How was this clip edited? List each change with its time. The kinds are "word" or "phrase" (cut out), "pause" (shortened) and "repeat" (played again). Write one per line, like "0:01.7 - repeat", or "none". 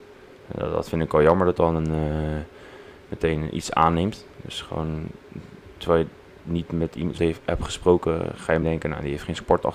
0:01.6 - word
0:07.2 - word
0:08.6 - word